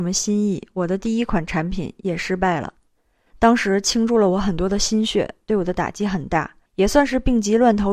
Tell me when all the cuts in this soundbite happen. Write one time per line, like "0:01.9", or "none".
0:06.7